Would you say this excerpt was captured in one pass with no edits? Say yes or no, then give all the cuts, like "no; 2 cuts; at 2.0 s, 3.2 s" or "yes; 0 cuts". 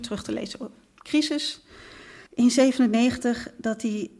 no; 1 cut; at 2.3 s